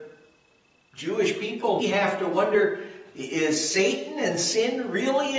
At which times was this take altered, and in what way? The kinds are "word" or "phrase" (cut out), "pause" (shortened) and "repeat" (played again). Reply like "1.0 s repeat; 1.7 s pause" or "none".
1.8 s word